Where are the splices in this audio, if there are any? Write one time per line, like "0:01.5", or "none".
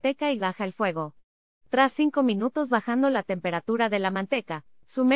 none